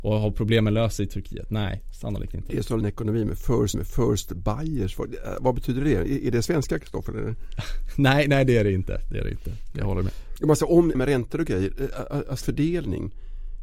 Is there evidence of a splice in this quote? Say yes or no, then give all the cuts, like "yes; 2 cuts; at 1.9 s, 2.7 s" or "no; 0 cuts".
yes; 4 cuts; at 2.8 s, 3.7 s, 10.9 s, 12.4 s